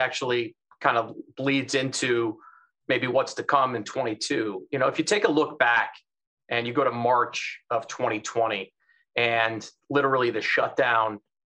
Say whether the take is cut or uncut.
uncut